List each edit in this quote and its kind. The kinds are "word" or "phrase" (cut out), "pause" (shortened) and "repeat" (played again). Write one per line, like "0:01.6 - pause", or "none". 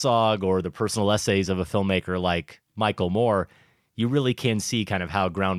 none